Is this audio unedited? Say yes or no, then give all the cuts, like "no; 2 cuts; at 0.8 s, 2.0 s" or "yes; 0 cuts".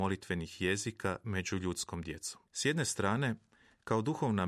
no; 1 cut; at 2.5 s